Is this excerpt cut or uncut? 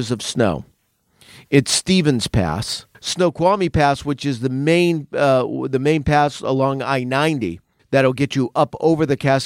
cut